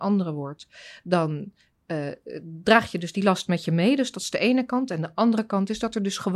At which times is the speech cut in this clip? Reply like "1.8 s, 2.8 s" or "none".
none